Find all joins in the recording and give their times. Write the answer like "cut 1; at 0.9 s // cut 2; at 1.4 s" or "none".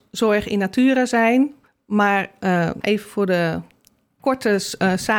cut 1; at 1.7 s // cut 2; at 2.8 s